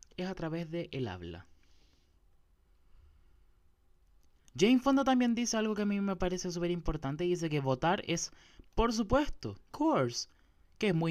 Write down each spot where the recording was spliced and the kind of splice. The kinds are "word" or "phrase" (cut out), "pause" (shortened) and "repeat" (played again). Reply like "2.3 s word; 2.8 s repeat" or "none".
9.7 s word